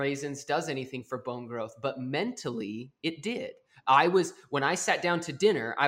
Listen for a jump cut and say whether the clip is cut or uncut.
uncut